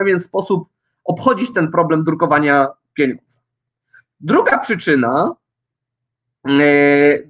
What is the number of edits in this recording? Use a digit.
0